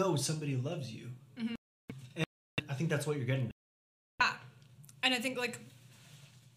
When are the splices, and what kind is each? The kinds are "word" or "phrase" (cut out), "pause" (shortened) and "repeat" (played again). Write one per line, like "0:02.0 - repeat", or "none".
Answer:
none